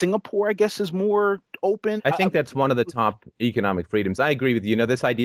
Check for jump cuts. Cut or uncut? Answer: cut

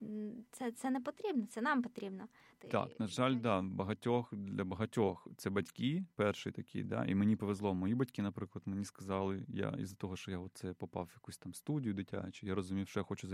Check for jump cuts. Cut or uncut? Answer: uncut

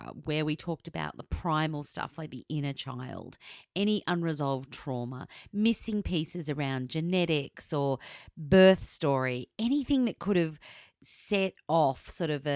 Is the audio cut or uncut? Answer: uncut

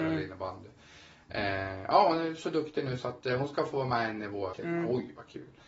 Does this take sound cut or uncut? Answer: cut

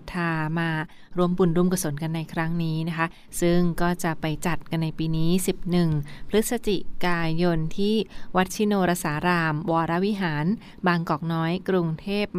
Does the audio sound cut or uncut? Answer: uncut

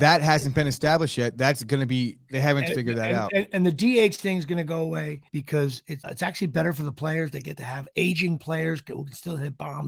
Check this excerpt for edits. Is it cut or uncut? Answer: cut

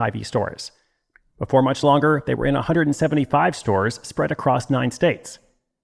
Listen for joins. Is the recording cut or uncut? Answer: uncut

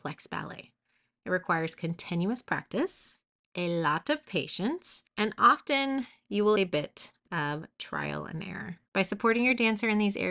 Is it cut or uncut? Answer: cut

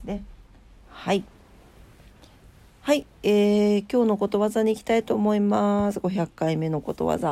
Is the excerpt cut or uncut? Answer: uncut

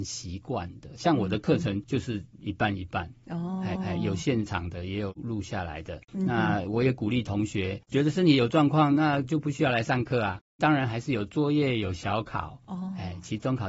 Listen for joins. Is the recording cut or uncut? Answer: cut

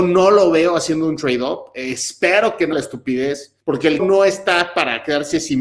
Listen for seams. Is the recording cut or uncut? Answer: cut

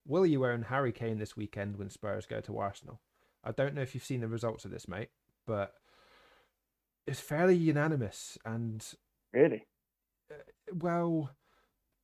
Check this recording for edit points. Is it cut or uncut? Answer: uncut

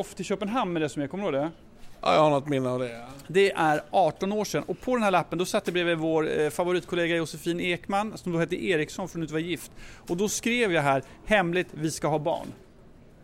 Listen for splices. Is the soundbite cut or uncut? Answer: uncut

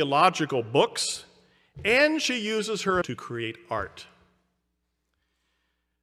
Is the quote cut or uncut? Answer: cut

